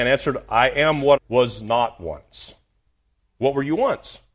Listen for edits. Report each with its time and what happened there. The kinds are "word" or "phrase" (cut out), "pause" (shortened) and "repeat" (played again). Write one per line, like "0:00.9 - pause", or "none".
0:01.2 - word